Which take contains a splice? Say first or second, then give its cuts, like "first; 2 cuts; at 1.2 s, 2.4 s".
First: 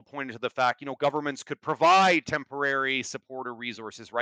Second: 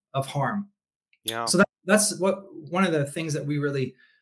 second; 1 cut; at 1.7 s